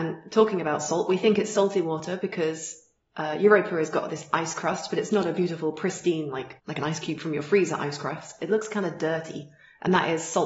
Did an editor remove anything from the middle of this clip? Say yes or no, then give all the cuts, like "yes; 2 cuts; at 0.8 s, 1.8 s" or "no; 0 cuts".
yes; 1 cut; at 6.6 s